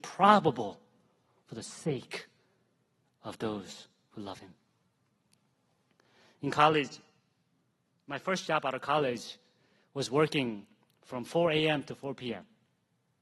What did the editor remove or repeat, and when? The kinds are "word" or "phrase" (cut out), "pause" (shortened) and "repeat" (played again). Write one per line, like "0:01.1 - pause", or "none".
none